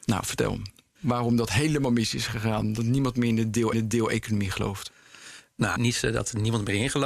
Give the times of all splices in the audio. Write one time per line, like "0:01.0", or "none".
0:03.7
0:05.8